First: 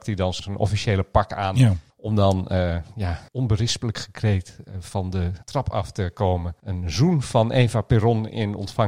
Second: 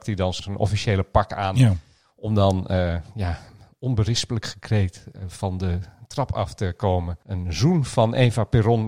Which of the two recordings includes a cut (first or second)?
first